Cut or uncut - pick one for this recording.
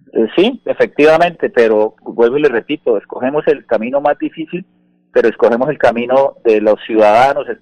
uncut